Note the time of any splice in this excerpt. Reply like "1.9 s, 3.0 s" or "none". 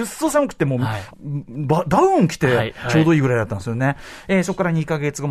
1.1 s